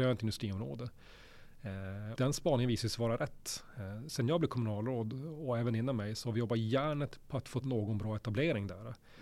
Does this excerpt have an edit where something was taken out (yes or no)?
yes